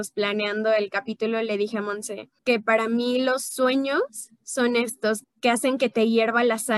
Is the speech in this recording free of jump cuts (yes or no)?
no